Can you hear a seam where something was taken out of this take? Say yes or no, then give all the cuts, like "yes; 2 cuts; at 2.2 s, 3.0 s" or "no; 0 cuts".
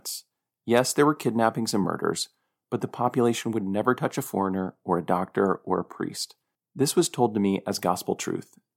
no; 0 cuts